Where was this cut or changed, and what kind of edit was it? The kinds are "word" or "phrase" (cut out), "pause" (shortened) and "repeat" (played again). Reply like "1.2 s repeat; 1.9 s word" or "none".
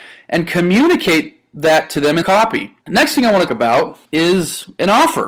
2.2 s word; 2.8 s pause; 3.5 s phrase